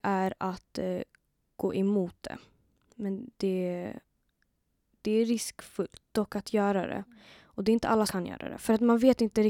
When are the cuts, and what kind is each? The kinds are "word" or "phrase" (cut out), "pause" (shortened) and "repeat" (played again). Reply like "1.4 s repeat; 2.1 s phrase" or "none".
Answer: 8.1 s word